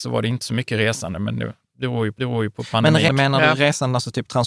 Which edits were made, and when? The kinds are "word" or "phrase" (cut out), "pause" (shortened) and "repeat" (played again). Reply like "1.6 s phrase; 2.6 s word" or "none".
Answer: 2.2 s repeat; 3.1 s word